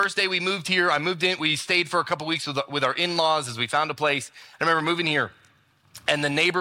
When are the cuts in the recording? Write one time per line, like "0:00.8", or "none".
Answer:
none